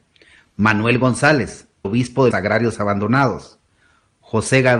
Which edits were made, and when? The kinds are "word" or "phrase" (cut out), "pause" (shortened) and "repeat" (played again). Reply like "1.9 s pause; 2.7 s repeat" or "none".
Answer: 1.8 s word; 2.3 s word